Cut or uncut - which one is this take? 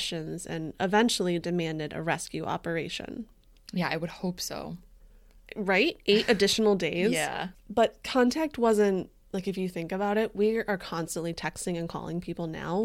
uncut